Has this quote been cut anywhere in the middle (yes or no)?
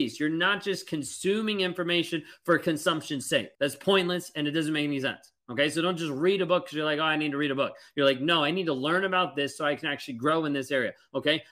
yes